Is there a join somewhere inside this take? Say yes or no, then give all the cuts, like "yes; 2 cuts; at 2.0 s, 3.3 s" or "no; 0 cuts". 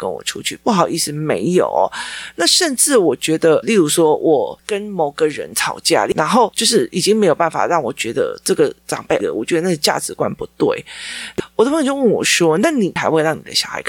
yes; 2 cuts; at 3.6 s, 9.2 s